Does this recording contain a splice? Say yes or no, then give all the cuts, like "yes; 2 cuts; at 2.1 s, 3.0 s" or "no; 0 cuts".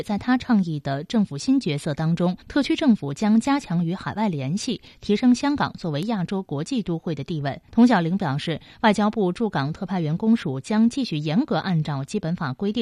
yes; 2 cuts; at 2.4 s, 7.7 s